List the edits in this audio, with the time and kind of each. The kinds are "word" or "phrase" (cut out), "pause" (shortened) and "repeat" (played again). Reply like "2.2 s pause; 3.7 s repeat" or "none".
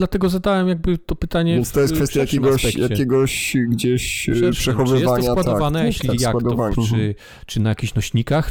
6.7 s phrase

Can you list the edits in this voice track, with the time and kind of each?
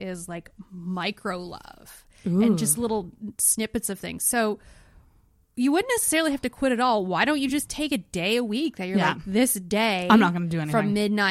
none

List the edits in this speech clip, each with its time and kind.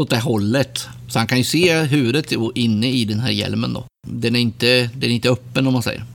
4.0 s pause

